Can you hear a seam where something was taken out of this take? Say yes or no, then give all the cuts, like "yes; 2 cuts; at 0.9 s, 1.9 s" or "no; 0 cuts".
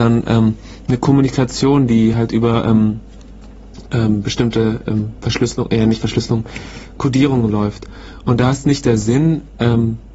no; 0 cuts